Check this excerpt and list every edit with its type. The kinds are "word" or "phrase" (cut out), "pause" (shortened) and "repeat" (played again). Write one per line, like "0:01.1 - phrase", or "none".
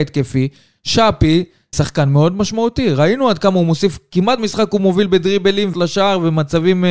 0:01.7 - word
0:04.4 - word
0:05.7 - word

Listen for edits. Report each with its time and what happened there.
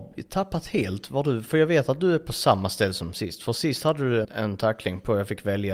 0:04.2 - word

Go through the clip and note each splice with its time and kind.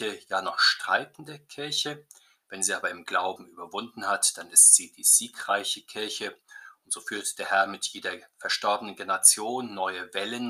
none

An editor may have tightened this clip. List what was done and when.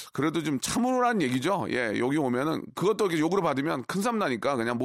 none

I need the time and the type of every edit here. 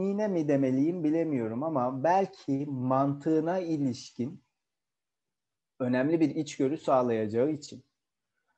none

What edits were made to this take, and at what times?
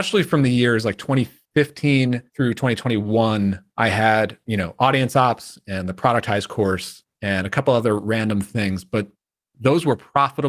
0:02.3 - pause
0:03.7 - pause
0:07.1 - pause

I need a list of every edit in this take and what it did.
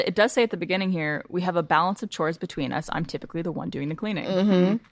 none

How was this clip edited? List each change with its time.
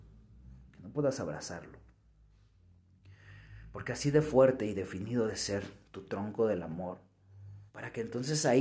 0:05.3 - word
0:07.7 - pause

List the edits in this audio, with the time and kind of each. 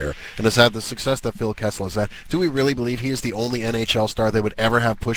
none

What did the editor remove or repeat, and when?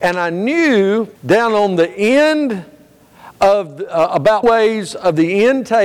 0:01.2 - pause
0:04.4 - word

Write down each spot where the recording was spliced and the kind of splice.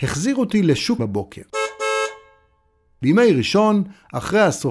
0:01.0 - phrase

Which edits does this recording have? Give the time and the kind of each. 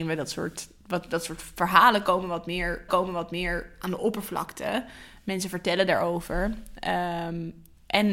0:02.9 - repeat

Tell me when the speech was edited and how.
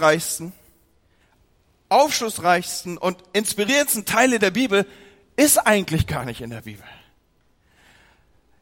none

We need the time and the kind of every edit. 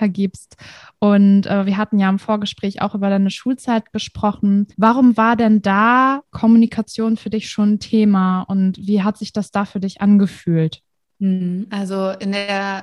0:04.7 - pause

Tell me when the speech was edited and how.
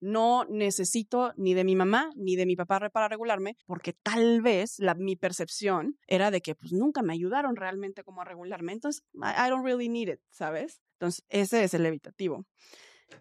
0:03.6 - pause
0:06.0 - pause
0:09.1 - pause
0:10.9 - pause

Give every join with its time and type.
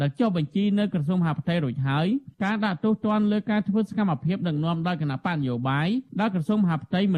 0:02.3 - pause
0:06.1 - pause

